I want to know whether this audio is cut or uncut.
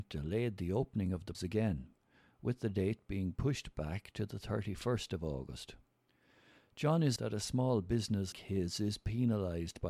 cut